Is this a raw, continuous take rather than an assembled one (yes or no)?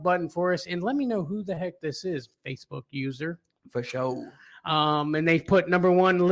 yes